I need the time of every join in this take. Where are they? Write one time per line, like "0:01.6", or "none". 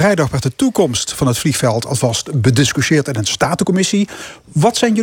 none